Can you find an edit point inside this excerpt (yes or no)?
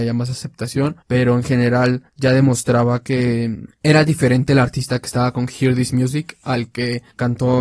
yes